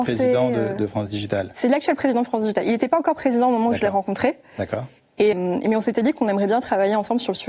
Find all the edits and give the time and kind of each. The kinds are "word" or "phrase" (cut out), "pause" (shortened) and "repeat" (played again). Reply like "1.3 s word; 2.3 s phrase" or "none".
5.3 s word